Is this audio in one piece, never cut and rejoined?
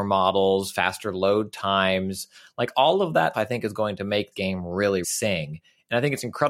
no; 3 cuts; at 3.3 s, 4.3 s, 5.0 s

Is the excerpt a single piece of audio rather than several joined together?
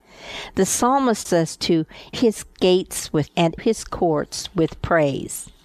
no; 4 cuts; at 1.2 s, 2.1 s, 3.3 s, 3.6 s

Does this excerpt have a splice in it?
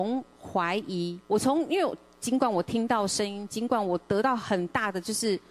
yes; 1 cut; at 1.2 s

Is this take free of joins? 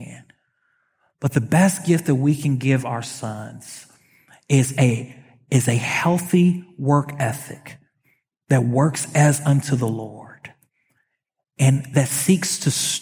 yes; 0 cuts

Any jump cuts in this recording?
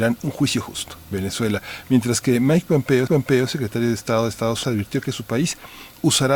yes; 3 cuts; at 1.1 s, 3.1 s, 4.6 s

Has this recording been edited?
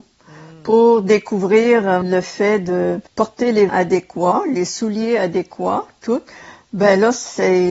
yes; 3 cuts; at 2.0 s, 3.1 s, 3.7 s

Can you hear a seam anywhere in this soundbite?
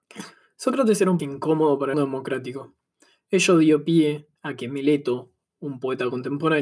yes; 3 cuts; at 1.2 s, 1.9 s, 4.4 s

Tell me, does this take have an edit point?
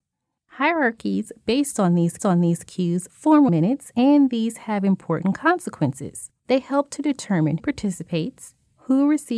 yes; 4 cuts; at 2.2 s, 3.5 s, 6.4 s, 7.6 s

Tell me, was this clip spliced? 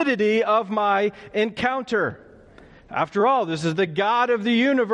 no; 0 cuts

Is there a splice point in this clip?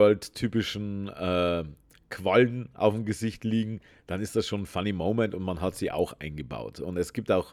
no; 0 cuts

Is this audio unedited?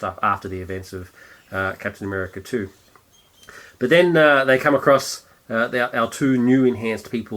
yes; 0 cuts

